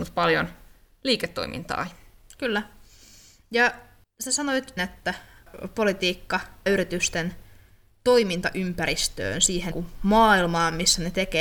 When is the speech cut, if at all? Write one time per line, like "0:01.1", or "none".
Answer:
0:04.8
0:06.7
0:09.7